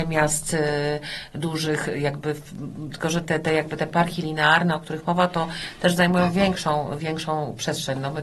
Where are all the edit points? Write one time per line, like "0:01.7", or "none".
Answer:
0:03.2